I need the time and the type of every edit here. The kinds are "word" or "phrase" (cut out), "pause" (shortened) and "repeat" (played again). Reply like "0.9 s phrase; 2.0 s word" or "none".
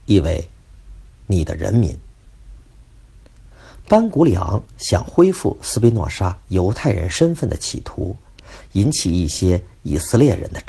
none